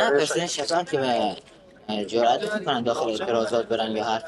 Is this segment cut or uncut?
uncut